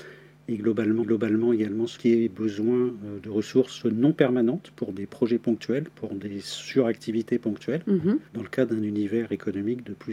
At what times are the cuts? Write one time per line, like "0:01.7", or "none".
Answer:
0:01.0
0:02.0
0:08.3